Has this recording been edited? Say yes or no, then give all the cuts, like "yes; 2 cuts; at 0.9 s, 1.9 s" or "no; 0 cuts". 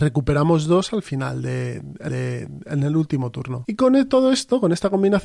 yes; 1 cut; at 2.1 s